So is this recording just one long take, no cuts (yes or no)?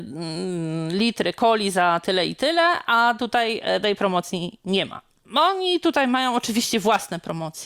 yes